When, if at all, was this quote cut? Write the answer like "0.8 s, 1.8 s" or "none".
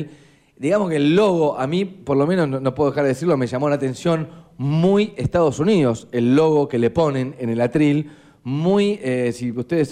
none